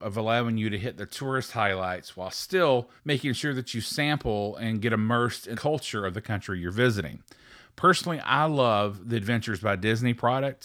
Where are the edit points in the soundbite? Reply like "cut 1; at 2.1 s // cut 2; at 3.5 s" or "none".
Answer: cut 1; at 3.0 s // cut 2; at 5.5 s